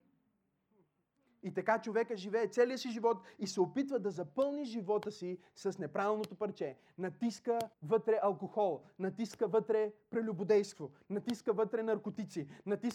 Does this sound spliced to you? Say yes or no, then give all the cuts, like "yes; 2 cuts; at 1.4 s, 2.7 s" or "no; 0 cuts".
yes; 1 cut; at 7.7 s